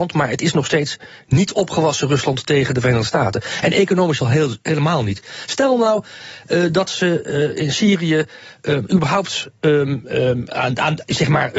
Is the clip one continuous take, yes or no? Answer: yes